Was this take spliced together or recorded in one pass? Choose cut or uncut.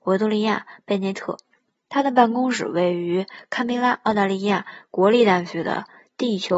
uncut